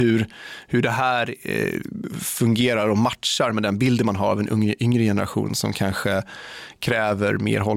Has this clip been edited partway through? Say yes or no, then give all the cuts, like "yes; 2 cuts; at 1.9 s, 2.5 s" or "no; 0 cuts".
no; 0 cuts